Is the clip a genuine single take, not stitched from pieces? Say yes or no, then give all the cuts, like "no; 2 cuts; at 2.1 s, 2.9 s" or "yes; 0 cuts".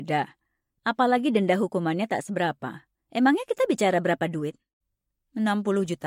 no; 1 cut; at 2.9 s